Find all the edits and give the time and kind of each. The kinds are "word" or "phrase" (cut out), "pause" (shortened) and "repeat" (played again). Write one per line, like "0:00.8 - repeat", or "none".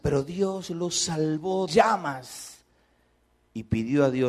0:01.7 - phrase